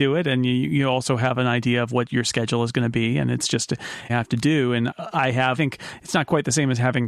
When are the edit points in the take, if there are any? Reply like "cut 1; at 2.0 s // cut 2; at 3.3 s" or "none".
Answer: cut 1; at 4.1 s // cut 2; at 4.9 s // cut 3; at 5.6 s

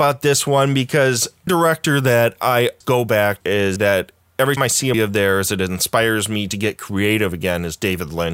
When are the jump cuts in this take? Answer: cut 1; at 1.5 s // cut 2; at 2.8 s // cut 3; at 3.4 s // cut 4; at 3.8 s // cut 5; at 4.6 s // cut 6; at 4.9 s

